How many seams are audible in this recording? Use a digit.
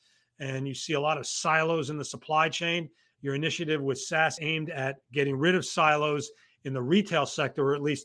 1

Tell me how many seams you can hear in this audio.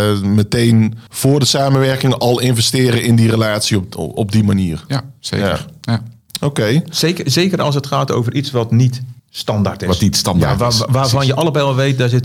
2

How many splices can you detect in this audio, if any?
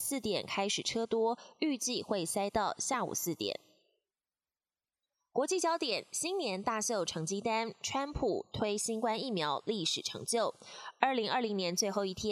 0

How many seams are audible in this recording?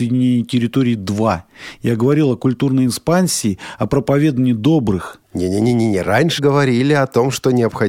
1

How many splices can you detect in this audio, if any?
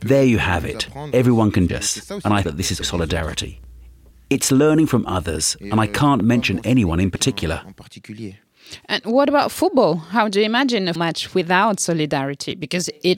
4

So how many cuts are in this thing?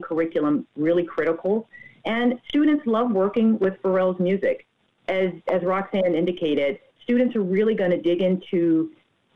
0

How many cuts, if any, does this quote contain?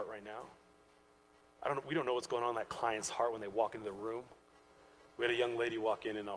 0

